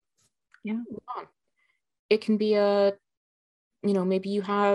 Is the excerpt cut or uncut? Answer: uncut